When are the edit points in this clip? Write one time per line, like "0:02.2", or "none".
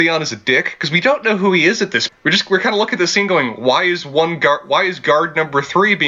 0:02.1